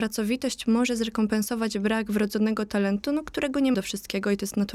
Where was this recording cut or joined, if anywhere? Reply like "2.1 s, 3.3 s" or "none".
3.7 s